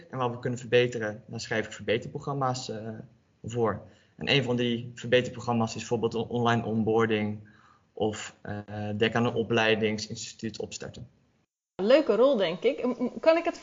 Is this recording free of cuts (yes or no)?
yes